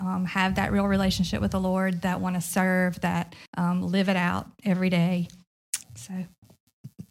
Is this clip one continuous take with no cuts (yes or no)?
no